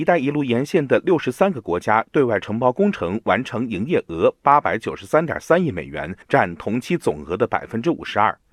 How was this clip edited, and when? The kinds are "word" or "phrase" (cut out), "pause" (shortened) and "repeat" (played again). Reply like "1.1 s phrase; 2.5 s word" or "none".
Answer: 6.2 s pause

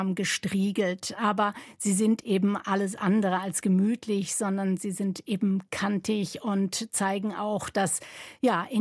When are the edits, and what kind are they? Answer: none

